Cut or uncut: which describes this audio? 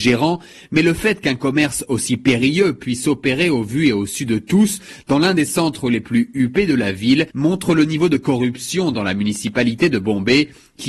cut